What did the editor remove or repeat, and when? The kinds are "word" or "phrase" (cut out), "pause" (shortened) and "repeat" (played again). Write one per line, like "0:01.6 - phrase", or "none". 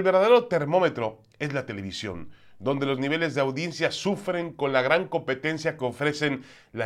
none

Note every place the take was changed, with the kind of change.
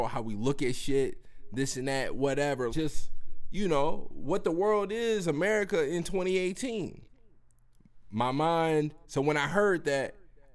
0:02.7 - word
0:09.0 - pause

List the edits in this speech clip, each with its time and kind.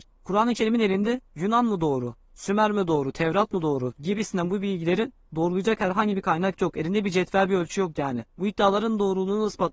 0:01.3 - pause
0:08.3 - pause

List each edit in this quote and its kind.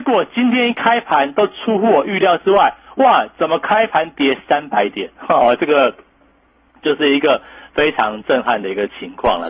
none

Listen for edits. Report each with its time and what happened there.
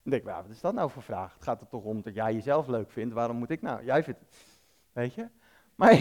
none

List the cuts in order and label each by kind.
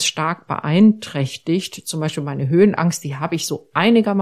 none

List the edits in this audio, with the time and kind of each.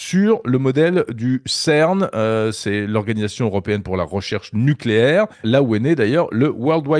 0:05.3 - pause

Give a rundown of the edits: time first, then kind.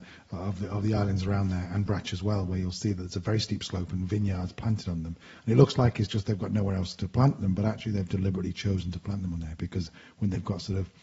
none

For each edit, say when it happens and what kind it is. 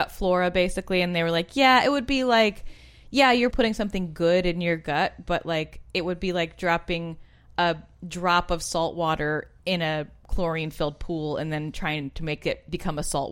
0:03.5 - word
0:09.6 - pause

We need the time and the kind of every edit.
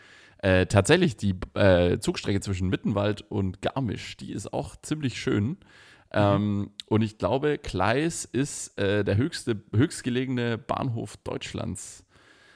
none

